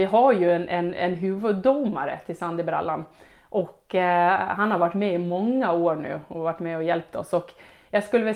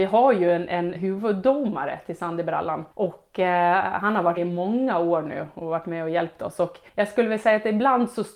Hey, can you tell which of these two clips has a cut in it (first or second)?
second